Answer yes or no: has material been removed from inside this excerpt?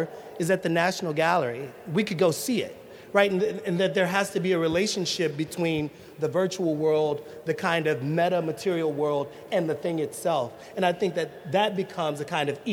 no